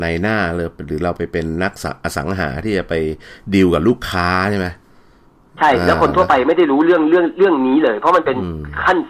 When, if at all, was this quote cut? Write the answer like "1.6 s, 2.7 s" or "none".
none